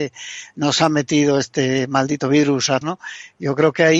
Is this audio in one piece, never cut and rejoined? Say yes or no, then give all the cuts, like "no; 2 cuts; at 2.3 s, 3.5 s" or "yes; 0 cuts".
no; 1 cut; at 2.8 s